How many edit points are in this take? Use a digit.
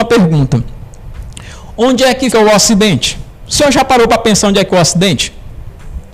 3